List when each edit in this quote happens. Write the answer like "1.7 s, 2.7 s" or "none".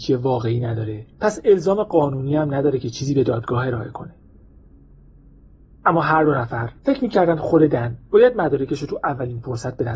1.1 s, 6.8 s